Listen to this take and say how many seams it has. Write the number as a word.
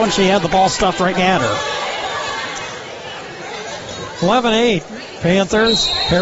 one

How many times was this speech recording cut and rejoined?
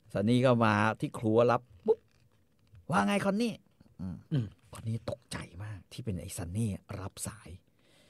two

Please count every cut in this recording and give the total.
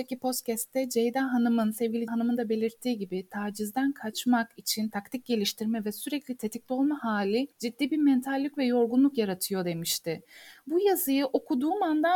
two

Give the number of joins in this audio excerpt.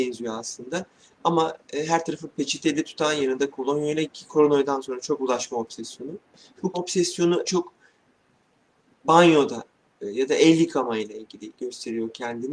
four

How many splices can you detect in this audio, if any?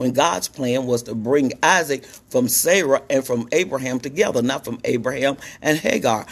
zero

